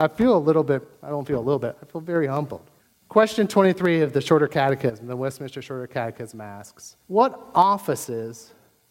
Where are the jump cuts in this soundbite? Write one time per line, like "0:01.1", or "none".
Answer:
0:00.9
0:02.8
0:07.0